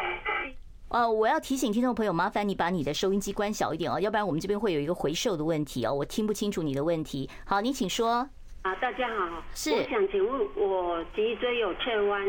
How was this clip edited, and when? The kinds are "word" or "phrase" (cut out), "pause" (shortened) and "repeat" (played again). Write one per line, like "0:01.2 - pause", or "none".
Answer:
none